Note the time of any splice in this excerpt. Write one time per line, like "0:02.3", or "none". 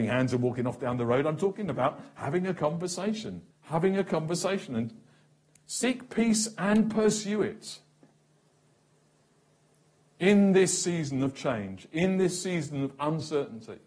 0:03.5